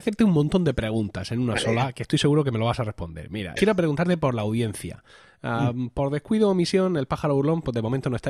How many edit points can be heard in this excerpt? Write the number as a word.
one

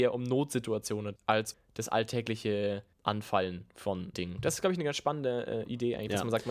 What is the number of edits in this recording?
four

